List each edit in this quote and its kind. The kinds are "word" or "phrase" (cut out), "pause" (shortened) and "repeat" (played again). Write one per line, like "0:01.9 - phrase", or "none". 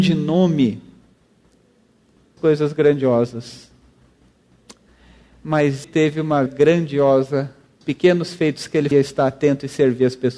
0:02.4 - word
0:05.8 - word
0:06.5 - word
0:07.8 - word
0:08.9 - word